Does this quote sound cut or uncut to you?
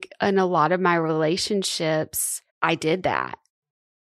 cut